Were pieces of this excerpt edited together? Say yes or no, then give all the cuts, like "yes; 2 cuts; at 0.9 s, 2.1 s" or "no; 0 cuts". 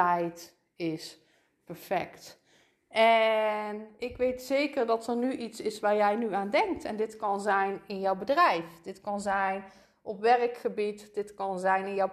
no; 0 cuts